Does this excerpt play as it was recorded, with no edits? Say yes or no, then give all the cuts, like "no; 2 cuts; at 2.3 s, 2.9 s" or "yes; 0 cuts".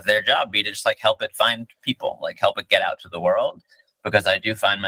yes; 0 cuts